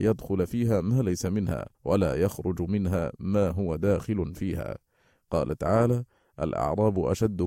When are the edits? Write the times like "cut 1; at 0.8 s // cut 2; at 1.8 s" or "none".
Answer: cut 1; at 1.7 s